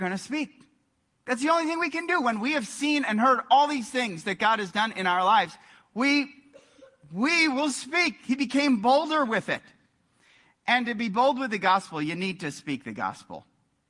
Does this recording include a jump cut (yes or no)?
no